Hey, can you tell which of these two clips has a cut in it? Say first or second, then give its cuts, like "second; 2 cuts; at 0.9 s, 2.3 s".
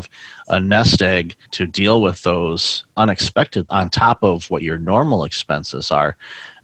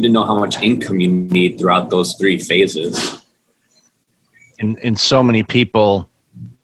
first; 3 cuts; at 1.5 s, 2.9 s, 3.7 s